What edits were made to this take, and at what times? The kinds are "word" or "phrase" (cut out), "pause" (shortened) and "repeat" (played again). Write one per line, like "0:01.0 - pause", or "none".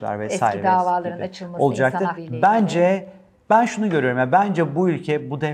0:02.1 - word
0:03.3 - word